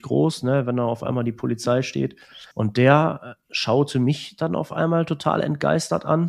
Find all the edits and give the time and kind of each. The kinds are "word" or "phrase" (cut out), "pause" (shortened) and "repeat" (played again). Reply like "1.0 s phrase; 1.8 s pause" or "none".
2.5 s pause